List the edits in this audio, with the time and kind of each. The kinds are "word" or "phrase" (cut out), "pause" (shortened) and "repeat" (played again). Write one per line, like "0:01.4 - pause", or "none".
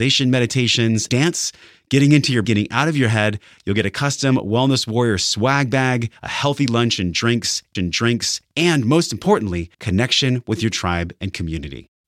0:01.1 - word
0:02.4 - word
0:06.2 - pause
0:07.7 - repeat
0:09.7 - pause